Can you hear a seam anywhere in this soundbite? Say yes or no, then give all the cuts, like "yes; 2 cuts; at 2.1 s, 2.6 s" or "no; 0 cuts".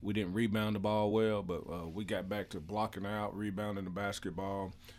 no; 0 cuts